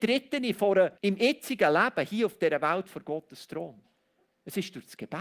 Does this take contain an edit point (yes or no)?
yes